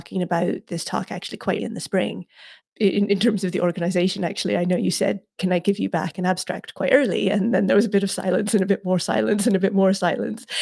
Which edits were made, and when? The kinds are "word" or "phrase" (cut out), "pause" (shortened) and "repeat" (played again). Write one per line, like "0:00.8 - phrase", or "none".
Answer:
0:01.6 - word